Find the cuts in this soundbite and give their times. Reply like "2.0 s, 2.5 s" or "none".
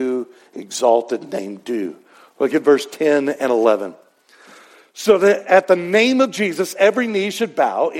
none